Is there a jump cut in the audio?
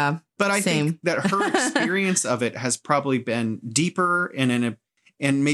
no; 0 cuts

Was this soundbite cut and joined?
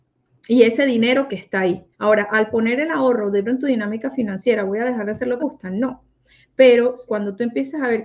yes; 5 cuts; at 1.3 s, 1.9 s, 3.4 s, 5.4 s, 7.1 s

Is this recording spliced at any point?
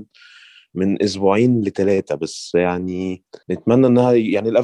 yes; 1 cut; at 3.4 s

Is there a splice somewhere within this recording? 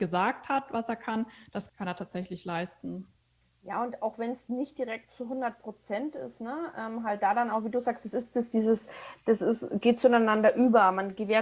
no; 0 cuts

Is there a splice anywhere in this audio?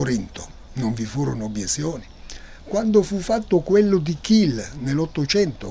no; 0 cuts

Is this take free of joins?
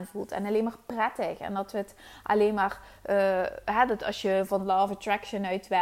yes; 0 cuts

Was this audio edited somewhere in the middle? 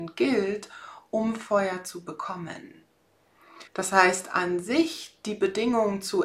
yes; 1 cut; at 3.7 s

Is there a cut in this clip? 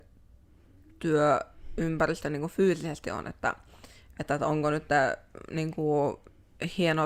no; 0 cuts

